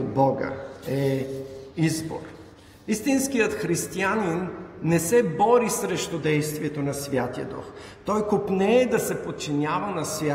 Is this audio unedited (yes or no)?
yes